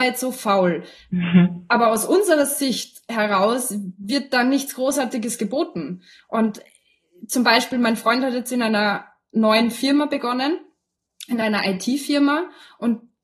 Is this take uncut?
yes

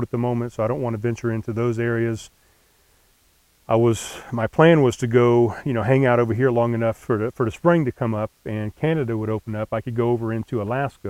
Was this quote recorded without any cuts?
yes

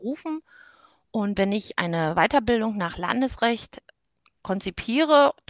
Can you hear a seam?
no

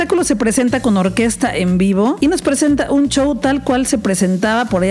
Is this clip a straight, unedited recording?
yes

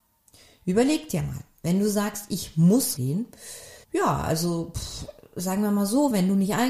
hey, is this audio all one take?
no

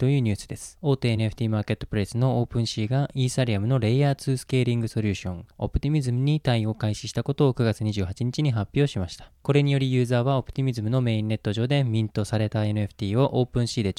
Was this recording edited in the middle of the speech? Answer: no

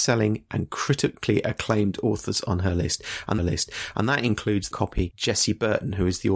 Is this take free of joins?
no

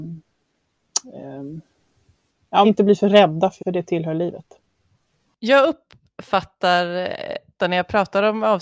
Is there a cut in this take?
yes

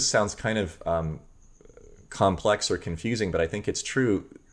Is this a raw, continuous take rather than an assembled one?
yes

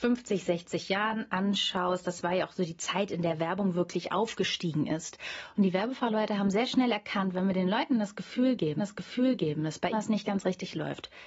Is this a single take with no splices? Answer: no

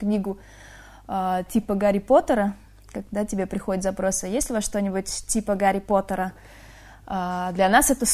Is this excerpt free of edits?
yes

